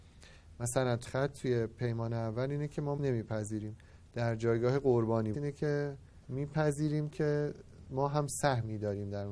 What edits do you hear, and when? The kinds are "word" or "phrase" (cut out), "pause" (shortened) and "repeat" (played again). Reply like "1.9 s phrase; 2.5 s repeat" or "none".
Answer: 1.0 s word; 3.0 s word; 5.3 s phrase; 6.2 s pause